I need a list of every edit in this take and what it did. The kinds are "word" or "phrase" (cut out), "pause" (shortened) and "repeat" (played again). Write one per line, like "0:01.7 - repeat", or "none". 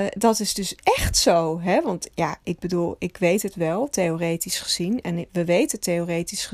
none